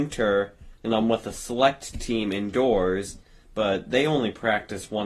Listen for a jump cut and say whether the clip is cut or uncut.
uncut